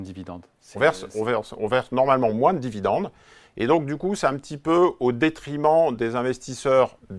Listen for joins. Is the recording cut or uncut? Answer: uncut